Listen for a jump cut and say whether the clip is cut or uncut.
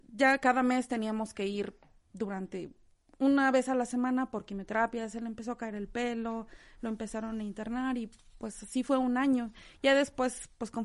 uncut